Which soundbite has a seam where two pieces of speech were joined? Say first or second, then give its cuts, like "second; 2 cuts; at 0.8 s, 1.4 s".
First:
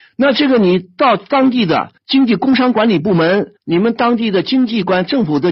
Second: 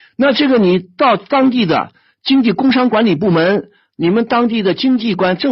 first; 2 cuts; at 2.0 s, 3.6 s